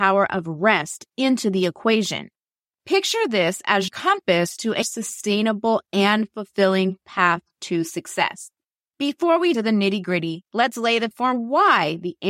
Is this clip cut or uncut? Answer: cut